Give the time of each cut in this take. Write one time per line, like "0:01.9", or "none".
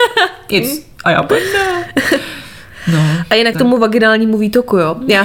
0:01.0
0:03.5